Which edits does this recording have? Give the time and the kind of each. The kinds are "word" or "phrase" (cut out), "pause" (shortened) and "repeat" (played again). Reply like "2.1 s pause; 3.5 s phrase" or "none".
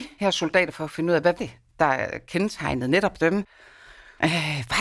1.4 s word